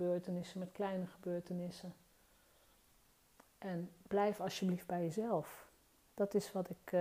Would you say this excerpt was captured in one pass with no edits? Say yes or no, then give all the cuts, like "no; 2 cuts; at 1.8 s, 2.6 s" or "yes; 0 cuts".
yes; 0 cuts